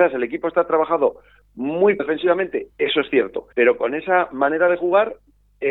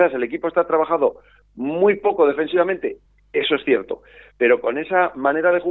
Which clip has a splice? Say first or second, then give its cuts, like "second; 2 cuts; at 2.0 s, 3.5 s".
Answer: first; 3 cuts; at 2.0 s, 2.7 s, 3.5 s